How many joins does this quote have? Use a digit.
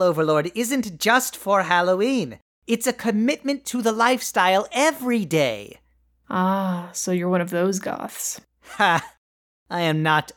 0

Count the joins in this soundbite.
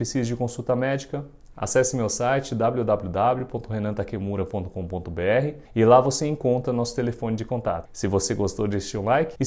0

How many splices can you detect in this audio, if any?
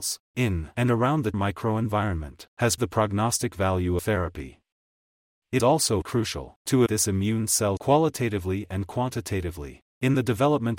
7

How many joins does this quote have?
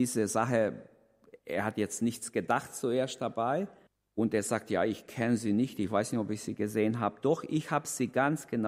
2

